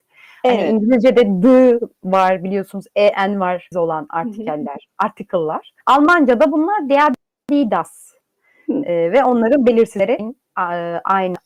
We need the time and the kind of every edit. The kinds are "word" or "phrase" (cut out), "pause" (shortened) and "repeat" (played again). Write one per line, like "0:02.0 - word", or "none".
0:03.7 - word
0:05.8 - pause
0:08.2 - pause
0:10.2 - word